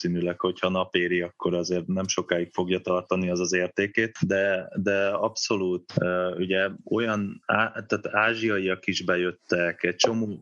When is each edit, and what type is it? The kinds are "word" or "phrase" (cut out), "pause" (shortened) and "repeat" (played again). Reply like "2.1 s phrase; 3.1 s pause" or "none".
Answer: none